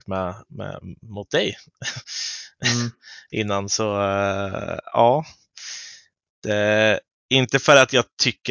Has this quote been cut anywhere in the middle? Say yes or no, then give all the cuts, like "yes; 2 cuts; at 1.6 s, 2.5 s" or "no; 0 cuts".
no; 0 cuts